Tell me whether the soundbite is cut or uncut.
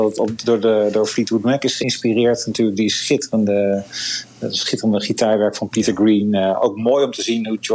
uncut